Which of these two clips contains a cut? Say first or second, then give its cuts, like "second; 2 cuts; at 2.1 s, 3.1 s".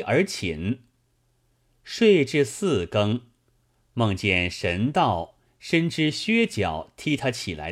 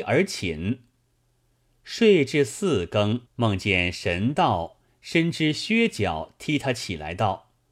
second; 1 cut; at 3.3 s